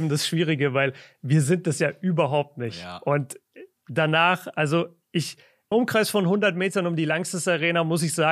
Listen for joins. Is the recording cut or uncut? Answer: cut